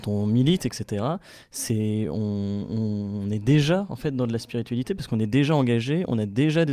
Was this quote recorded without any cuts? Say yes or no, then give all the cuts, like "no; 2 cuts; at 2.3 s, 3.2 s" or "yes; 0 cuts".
yes; 0 cuts